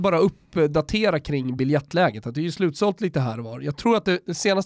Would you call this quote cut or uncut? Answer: uncut